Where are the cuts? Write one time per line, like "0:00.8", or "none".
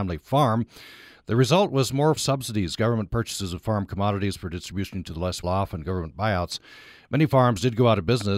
0:02.2
0:05.4